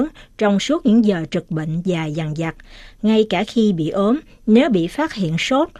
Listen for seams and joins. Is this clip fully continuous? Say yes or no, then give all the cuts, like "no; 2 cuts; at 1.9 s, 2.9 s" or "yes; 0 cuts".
yes; 0 cuts